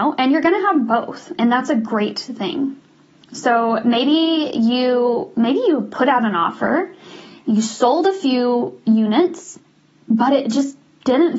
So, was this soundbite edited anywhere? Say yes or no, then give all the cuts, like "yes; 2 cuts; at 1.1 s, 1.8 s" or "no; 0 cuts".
no; 0 cuts